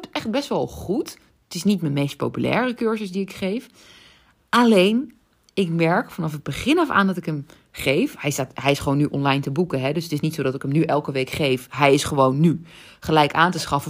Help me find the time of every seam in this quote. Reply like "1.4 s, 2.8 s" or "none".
none